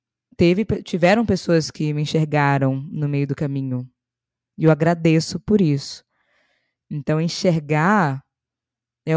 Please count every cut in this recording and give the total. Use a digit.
0